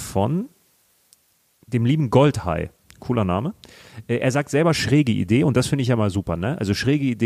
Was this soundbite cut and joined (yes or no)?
no